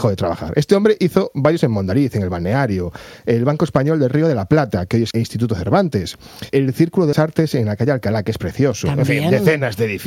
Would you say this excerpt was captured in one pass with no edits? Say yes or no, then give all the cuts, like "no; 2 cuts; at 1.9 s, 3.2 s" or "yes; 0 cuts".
no; 4 cuts; at 1.6 s, 5.1 s, 6.5 s, 7.1 s